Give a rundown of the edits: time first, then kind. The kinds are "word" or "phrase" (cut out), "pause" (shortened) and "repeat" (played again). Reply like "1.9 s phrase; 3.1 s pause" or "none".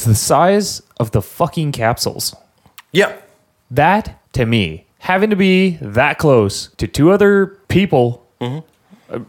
4.2 s pause; 4.9 s pause; 6.7 s pause; 7.6 s pause